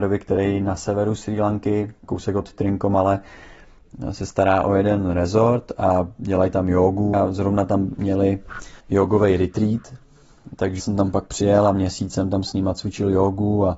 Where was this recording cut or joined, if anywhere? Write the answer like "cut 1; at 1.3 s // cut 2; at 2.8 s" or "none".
cut 1; at 2.0 s // cut 2; at 7.1 s // cut 3; at 8.8 s // cut 4; at 10.8 s